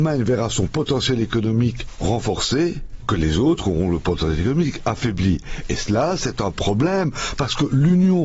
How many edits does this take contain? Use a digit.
1